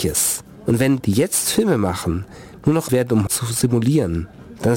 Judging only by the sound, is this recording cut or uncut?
cut